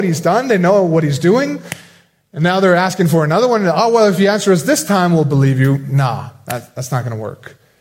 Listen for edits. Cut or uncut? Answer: uncut